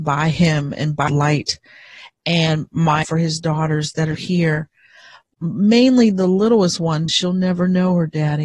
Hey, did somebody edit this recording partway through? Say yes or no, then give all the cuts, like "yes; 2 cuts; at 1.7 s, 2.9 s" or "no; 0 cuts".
yes; 4 cuts; at 1.1 s, 3.0 s, 4.1 s, 7.1 s